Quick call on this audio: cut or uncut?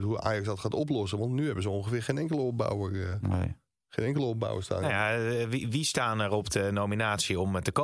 uncut